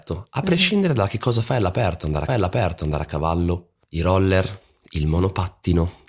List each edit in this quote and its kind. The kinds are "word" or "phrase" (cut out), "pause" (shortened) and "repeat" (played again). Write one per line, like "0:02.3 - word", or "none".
0:02.3 - repeat